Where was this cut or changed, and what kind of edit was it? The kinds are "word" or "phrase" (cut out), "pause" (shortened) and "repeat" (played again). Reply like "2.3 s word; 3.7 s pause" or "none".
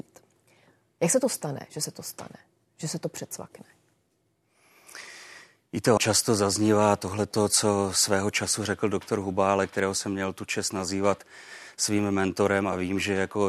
6.0 s word